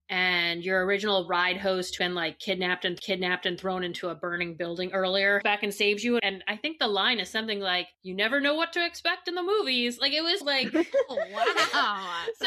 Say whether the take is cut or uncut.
cut